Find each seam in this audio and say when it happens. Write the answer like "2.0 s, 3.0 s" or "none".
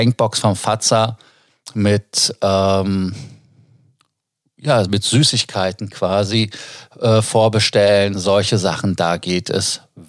none